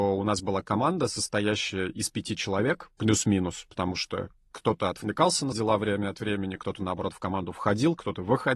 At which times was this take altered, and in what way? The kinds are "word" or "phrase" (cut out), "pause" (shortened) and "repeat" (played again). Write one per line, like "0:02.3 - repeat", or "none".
0:05.5 - word